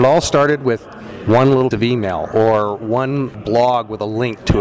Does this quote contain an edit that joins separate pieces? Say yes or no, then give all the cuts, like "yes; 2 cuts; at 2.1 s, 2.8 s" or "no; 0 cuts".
yes; 2 cuts; at 1.7 s, 3.3 s